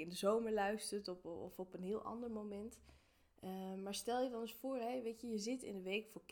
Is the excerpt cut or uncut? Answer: uncut